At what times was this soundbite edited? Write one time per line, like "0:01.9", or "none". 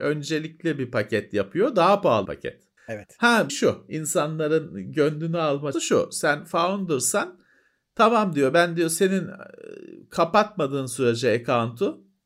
0:02.3
0:02.8
0:03.5
0:05.7